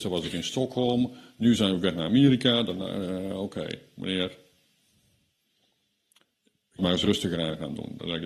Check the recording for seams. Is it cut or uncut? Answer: cut